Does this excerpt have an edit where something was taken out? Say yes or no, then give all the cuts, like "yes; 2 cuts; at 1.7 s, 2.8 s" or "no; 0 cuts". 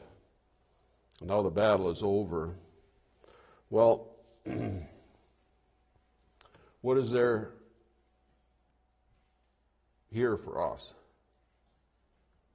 no; 0 cuts